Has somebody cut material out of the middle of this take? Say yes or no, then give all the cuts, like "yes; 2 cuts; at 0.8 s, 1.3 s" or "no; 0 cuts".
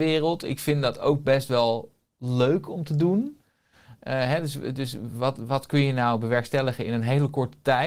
no; 0 cuts